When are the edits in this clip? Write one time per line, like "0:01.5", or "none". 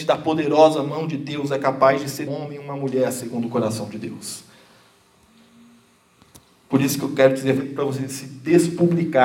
0:02.3
0:07.6